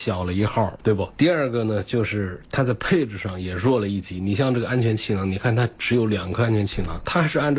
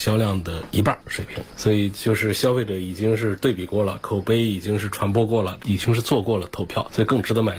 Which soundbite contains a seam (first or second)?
second